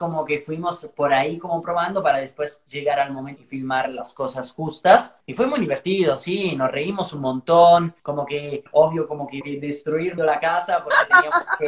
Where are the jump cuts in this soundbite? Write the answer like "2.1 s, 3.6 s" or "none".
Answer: 3.4 s, 5.2 s, 8.0 s, 8.7 s, 9.4 s, 10.2 s